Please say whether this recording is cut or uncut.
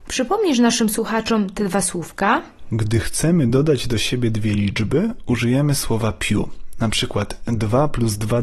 uncut